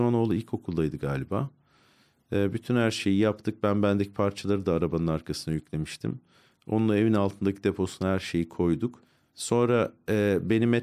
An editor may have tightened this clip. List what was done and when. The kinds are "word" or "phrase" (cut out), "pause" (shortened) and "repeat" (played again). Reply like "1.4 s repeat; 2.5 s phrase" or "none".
none